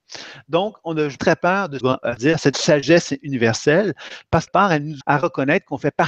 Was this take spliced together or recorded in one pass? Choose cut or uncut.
cut